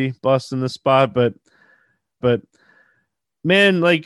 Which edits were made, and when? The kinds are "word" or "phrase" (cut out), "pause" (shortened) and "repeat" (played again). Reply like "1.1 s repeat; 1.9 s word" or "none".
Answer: 2.2 s repeat